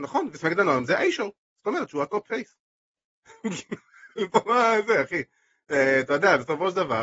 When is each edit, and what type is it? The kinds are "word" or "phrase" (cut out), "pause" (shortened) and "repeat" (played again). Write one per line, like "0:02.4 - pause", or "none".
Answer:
none